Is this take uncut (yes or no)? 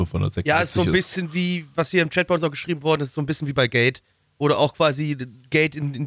yes